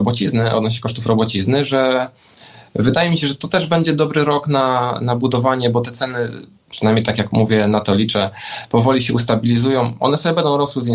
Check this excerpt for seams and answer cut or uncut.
uncut